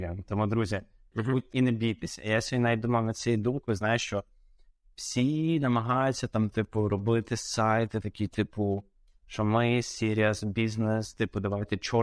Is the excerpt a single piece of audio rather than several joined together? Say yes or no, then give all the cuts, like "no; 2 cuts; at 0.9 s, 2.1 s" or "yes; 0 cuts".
no; 1 cut; at 1.5 s